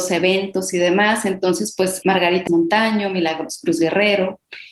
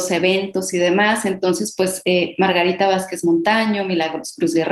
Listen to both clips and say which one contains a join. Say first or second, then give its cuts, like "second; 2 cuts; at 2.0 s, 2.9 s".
first; 2 cuts; at 2.0 s, 2.5 s